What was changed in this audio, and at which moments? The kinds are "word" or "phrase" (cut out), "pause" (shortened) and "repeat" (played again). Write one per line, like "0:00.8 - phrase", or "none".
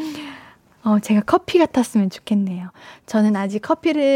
none